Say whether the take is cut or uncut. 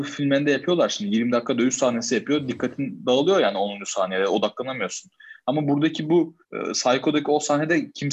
cut